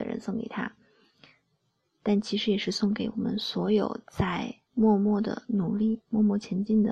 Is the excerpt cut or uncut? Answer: cut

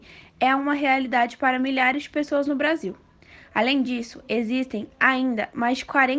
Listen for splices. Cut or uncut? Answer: uncut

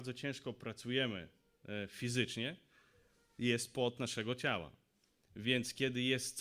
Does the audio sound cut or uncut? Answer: uncut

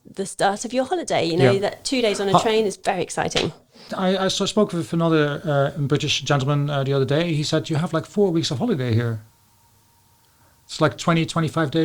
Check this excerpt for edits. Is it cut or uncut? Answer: uncut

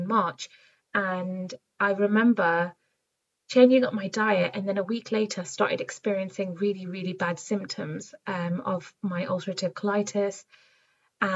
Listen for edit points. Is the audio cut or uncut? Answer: uncut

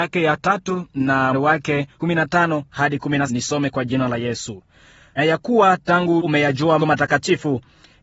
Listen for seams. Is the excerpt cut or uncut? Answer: cut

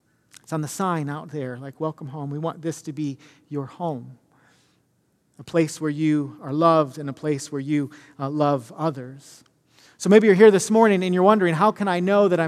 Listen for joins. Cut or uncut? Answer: uncut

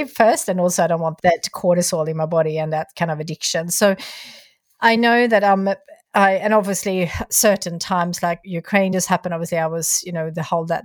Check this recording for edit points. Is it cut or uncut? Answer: uncut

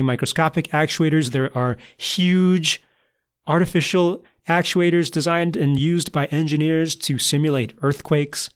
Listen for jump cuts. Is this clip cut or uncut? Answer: uncut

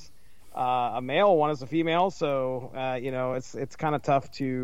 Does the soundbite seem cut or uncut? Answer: uncut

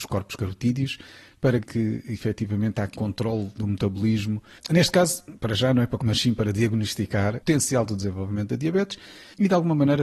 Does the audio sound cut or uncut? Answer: cut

